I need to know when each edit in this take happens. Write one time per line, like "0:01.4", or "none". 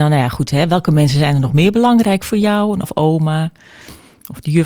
0:02.8